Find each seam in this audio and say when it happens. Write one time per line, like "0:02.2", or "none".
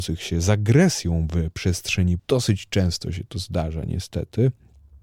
0:02.2